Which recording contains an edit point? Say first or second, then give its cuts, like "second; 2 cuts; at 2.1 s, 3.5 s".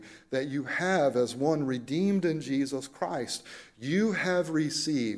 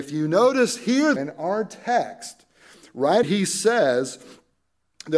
second; 2 cuts; at 1.2 s, 3.2 s